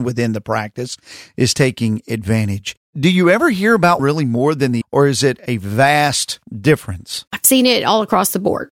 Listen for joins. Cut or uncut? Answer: cut